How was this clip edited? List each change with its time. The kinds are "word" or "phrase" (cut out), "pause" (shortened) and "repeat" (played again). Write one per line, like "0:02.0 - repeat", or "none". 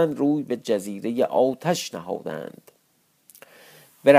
none

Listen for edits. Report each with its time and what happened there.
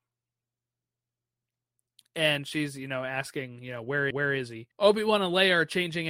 0:04.1 - repeat
0:04.7 - pause

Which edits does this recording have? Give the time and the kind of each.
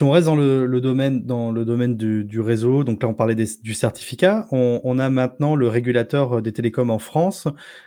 none

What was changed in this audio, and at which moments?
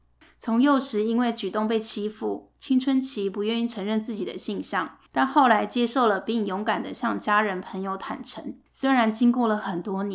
0:05.1 - pause
0:08.7 - pause

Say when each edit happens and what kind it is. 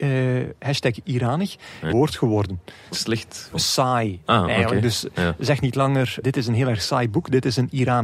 0:01.0 - word
0:01.9 - phrase
0:02.9 - word
0:03.5 - word
0:06.2 - word

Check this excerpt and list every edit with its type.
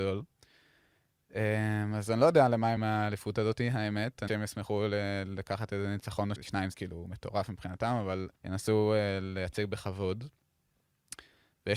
0:02.8 - word
0:04.3 - word
0:06.4 - word
0:06.7 - word
0:08.4 - pause

